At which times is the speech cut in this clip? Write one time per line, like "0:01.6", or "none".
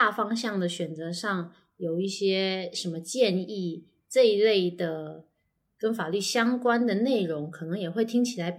none